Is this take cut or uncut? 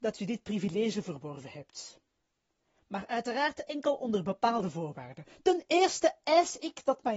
uncut